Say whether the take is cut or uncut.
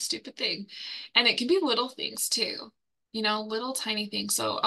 uncut